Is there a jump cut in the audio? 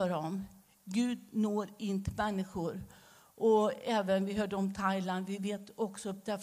no; 0 cuts

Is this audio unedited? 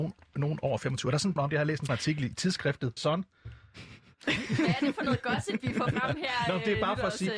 no; 3 cuts; at 1.4 s, 1.9 s, 3.0 s

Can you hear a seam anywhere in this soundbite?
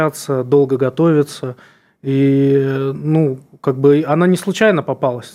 no; 0 cuts

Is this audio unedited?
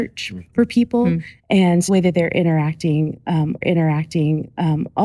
no; 3 cuts; at 1.4 s, 1.9 s, 3.6 s

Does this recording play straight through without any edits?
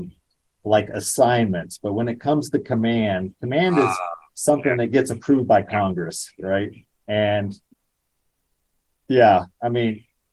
no; 1 cut; at 6.9 s

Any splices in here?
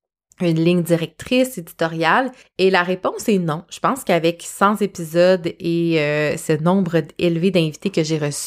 yes; 1 cut; at 2.4 s

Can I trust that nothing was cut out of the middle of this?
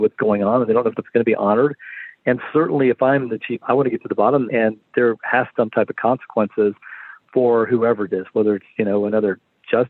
no; 5 cuts; at 1.0 s, 3.6 s, 4.5 s, 5.6 s, 8.1 s

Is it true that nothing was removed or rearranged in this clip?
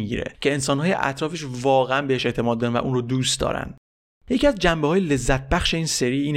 yes; 0 cuts

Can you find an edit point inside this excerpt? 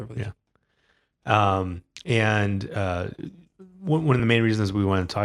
no; 0 cuts

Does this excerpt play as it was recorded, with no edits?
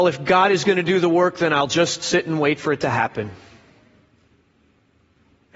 yes; 0 cuts

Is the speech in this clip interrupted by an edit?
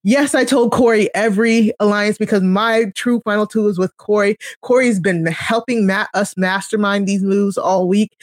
no; 0 cuts

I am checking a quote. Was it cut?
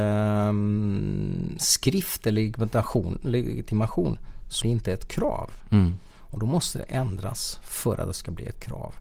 yes; 1 cut; at 4.6 s

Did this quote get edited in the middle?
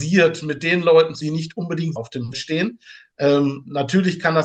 yes; 3 cuts; at 1.2 s, 2.0 s, 2.3 s

